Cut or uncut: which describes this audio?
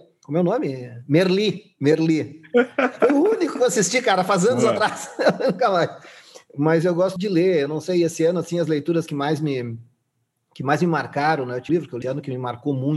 cut